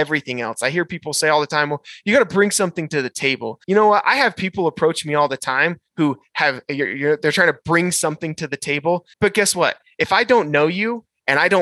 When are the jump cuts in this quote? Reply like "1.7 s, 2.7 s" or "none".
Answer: 3.6 s, 9.1 s